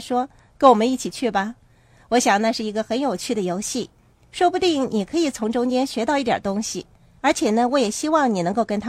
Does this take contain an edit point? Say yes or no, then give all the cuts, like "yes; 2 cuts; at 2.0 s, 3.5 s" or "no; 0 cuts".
no; 0 cuts